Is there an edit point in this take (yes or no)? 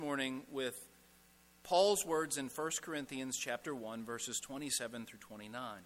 no